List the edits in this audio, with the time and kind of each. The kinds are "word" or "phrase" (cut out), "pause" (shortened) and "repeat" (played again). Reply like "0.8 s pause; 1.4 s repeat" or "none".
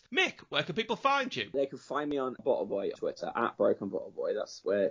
2.4 s word; 2.9 s word